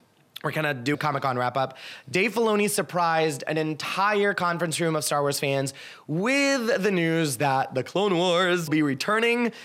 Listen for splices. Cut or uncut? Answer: cut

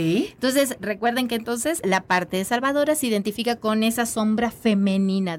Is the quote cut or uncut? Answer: cut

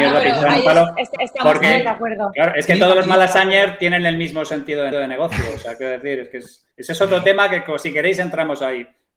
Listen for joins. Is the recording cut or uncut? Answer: cut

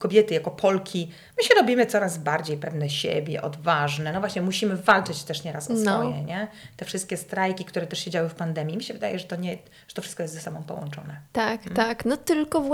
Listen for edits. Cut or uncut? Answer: uncut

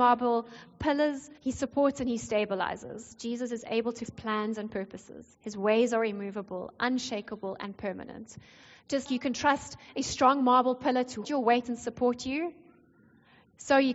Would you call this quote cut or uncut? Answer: cut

